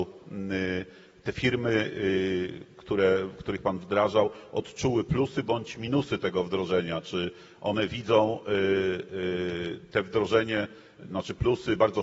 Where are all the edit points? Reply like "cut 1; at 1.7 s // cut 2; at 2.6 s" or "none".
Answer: none